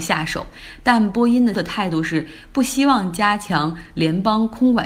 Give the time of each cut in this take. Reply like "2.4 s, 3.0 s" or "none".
1.5 s